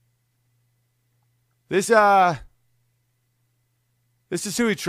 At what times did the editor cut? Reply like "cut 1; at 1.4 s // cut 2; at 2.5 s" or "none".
cut 1; at 1.9 s